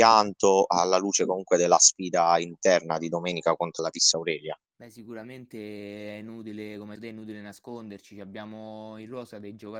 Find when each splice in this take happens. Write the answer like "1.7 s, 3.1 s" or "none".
3.8 s, 4.7 s, 7.0 s